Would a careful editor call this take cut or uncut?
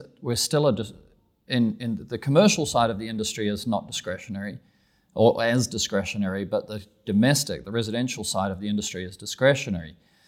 uncut